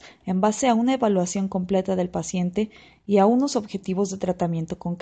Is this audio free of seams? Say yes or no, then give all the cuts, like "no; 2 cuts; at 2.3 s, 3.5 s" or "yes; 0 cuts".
yes; 0 cuts